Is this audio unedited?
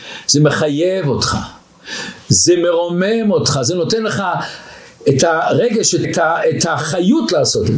no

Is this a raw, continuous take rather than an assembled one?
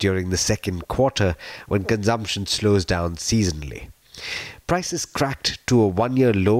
yes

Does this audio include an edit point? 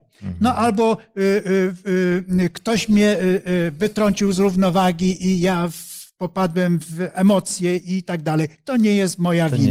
no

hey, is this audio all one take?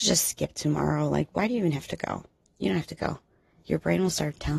yes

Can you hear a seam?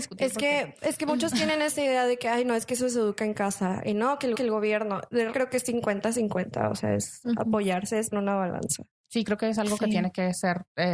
yes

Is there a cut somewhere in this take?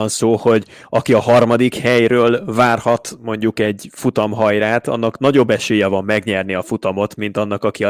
no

